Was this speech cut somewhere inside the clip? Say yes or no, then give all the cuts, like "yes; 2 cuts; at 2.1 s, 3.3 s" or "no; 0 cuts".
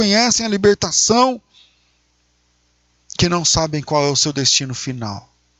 no; 0 cuts